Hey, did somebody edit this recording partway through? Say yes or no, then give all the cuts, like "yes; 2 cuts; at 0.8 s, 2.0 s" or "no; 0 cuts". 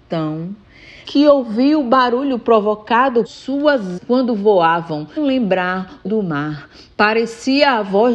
yes; 5 cuts; at 1.0 s, 3.2 s, 4.0 s, 5.2 s, 6.1 s